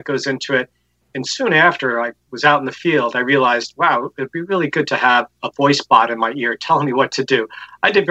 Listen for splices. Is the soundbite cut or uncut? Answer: uncut